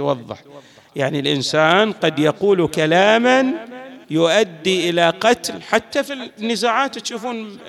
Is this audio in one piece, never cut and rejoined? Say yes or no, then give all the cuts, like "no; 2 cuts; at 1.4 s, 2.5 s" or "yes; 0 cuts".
no; 1 cut; at 4.0 s